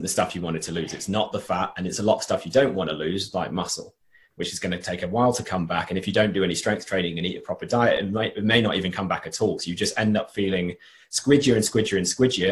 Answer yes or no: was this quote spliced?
no